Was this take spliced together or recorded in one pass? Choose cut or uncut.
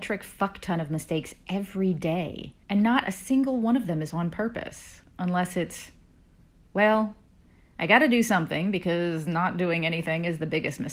cut